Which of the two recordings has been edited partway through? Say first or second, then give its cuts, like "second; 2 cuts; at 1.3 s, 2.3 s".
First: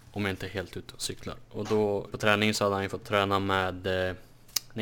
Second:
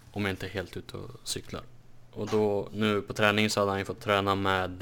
first; 3 cuts; at 0.9 s, 1.4 s, 2.1 s